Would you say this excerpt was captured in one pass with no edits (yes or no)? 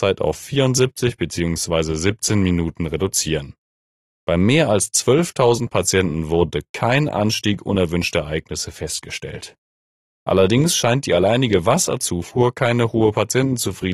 yes